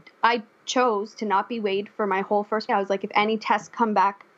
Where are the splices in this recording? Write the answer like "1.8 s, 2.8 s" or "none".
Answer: 2.7 s